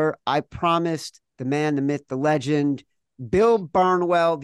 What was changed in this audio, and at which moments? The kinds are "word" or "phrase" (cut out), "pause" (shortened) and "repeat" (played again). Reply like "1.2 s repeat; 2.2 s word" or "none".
1.3 s pause